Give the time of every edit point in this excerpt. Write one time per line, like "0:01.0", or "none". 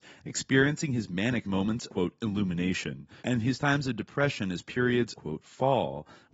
0:01.4
0:01.9
0:03.2
0:05.1